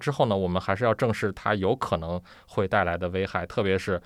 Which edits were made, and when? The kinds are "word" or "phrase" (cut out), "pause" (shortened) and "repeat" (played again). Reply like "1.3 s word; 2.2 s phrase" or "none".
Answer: none